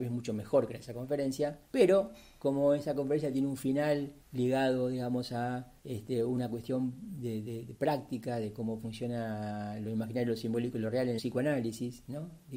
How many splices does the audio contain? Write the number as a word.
five